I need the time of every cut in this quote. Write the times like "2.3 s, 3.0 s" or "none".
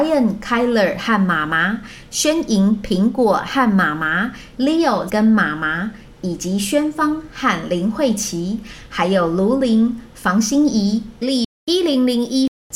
5.1 s, 11.2 s